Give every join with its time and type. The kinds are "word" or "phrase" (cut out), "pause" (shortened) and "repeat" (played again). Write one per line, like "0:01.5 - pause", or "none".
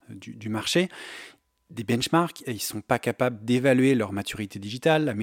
none

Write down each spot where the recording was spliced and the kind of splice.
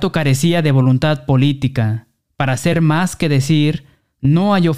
none

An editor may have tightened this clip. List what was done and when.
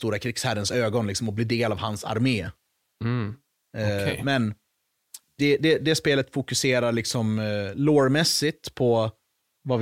none

